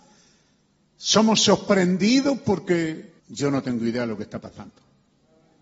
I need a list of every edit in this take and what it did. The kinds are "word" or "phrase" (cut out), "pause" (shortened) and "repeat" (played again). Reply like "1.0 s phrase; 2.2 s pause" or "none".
3.2 s pause